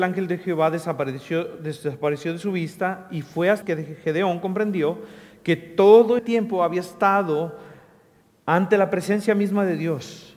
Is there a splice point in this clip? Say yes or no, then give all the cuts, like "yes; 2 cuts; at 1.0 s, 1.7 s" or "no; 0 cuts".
yes; 2 cuts; at 3.6 s, 6.2 s